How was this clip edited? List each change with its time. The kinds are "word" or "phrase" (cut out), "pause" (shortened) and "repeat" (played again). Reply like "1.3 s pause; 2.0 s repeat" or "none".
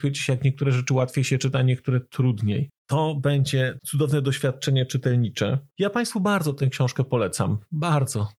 2.8 s pause; 5.7 s pause